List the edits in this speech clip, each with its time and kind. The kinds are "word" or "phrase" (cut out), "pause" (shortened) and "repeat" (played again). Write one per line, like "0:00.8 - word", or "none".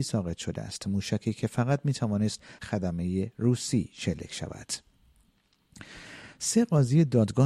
0:02.6 - word